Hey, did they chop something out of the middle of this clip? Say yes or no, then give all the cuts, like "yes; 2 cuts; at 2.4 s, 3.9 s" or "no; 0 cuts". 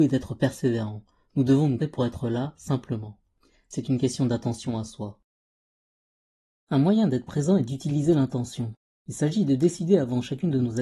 yes; 1 cut; at 1.8 s